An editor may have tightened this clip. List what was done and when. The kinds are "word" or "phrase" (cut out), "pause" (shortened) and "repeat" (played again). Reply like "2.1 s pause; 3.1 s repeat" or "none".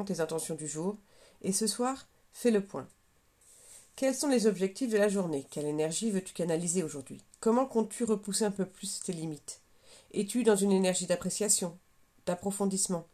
none